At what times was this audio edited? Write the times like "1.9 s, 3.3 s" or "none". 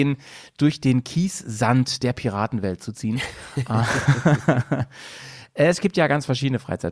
none